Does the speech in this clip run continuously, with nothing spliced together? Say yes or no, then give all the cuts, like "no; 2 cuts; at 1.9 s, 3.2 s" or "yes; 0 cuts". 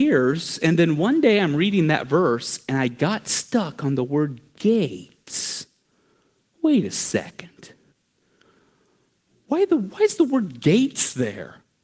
yes; 0 cuts